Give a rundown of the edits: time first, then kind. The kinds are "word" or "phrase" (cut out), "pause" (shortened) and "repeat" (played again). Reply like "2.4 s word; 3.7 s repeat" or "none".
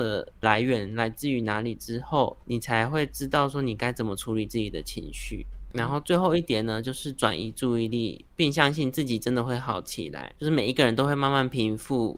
10.4 s pause